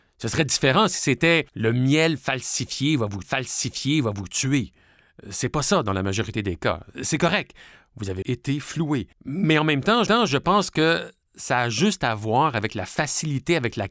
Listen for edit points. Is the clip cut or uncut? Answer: cut